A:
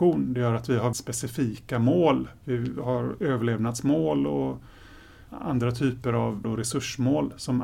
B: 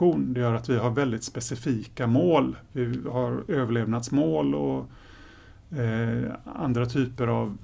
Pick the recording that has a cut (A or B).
A